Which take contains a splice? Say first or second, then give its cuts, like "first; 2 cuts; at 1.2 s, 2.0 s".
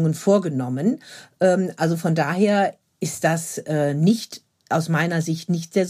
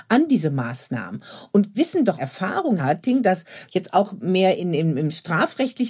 second; 4 cuts; at 1.7 s, 2.2 s, 2.8 s, 3.7 s